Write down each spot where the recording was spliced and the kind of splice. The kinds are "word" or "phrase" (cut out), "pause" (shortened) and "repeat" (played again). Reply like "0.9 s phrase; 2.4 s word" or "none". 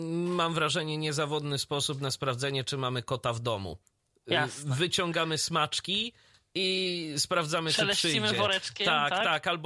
none